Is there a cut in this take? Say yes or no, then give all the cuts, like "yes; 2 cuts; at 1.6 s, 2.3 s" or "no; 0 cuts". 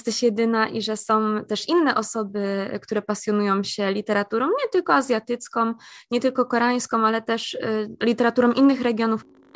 no; 0 cuts